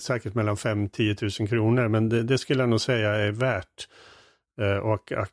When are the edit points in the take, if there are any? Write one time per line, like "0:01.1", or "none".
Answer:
none